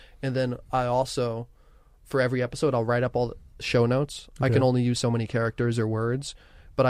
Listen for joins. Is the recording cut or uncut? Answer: uncut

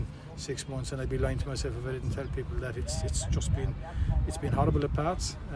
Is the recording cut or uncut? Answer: uncut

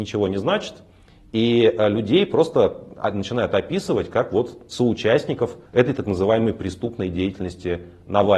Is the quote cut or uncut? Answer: cut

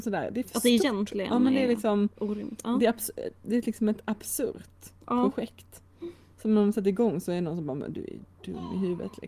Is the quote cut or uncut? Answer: uncut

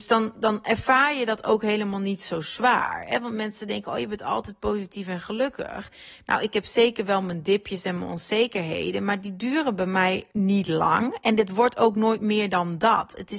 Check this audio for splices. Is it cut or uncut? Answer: cut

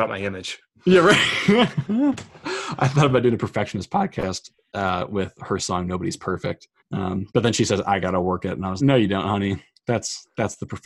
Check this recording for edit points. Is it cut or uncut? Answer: cut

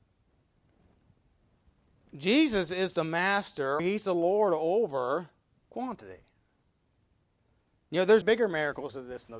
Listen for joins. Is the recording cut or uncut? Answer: cut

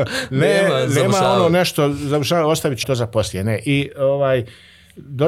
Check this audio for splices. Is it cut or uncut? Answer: cut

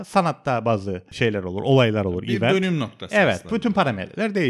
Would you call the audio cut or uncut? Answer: cut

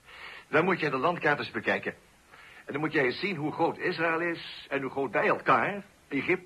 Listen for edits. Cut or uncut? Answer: uncut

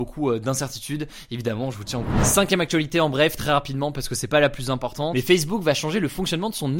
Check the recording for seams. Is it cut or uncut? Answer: cut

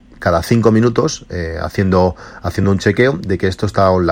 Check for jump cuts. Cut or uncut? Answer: uncut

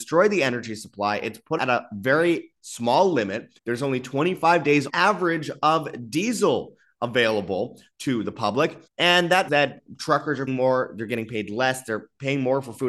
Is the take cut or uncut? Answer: cut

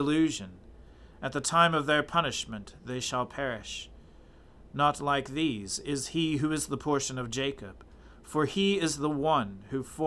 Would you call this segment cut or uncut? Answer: uncut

